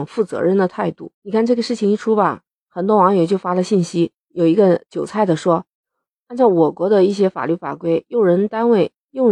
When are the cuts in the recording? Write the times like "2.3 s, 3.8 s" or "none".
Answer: 1.1 s, 4.2 s, 5.8 s